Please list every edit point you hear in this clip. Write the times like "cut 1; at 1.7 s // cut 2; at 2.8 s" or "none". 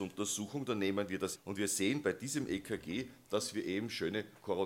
cut 1; at 1.4 s